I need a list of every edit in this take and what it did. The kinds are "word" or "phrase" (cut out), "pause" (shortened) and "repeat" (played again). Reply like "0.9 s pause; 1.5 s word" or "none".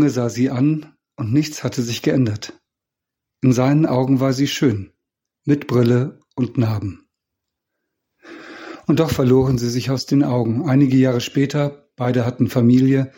none